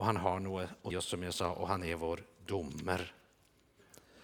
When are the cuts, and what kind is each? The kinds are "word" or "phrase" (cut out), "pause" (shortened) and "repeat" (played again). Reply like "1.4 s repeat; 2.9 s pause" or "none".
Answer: 0.9 s word